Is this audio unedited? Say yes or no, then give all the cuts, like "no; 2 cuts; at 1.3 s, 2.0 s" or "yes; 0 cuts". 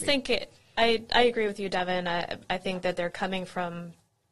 yes; 0 cuts